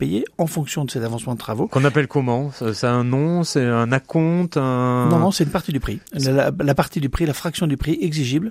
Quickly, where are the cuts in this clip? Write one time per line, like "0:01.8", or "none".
0:06.1